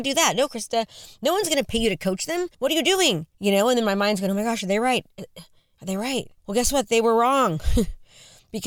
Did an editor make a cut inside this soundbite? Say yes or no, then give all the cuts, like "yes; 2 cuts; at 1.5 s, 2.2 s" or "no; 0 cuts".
yes; 3 cuts; at 2.5 s, 3.3 s, 6.4 s